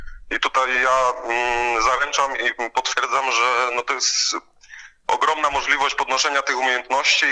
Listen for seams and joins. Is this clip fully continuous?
yes; 0 cuts

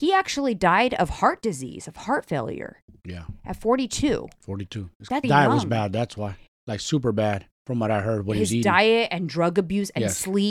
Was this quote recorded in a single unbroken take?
no; 2 cuts; at 5.2 s, 7.5 s

